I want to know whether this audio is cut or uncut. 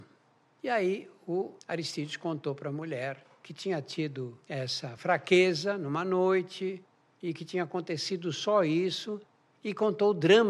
uncut